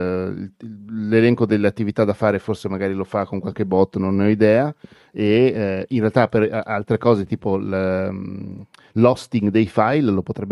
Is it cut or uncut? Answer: uncut